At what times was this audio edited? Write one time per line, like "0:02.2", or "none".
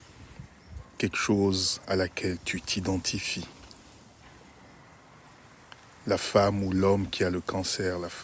none